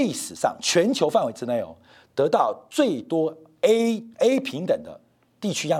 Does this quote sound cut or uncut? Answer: cut